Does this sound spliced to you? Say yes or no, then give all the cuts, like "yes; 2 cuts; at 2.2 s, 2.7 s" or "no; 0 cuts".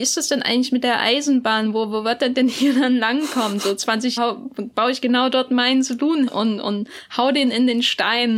yes; 2 cuts; at 4.2 s, 6.3 s